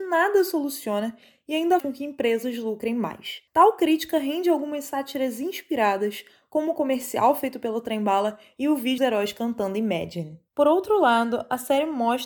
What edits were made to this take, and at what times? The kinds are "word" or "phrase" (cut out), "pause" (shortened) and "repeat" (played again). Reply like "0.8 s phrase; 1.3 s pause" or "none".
1.8 s word; 3.5 s pause; 9.0 s word; 10.5 s pause